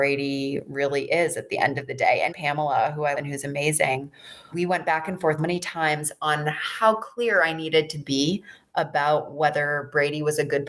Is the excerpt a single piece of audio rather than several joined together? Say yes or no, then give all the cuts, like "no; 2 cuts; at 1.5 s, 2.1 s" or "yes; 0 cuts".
no; 4 cuts; at 2.3 s, 3.1 s, 4.5 s, 5.4 s